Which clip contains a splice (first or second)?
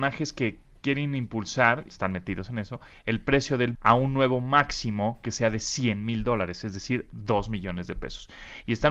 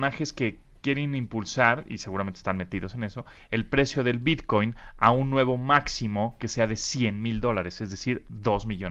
first